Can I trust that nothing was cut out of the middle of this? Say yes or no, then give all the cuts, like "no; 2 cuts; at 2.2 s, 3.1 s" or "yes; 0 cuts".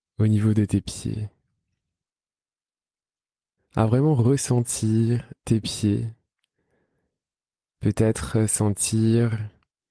no; 1 cut; at 5.4 s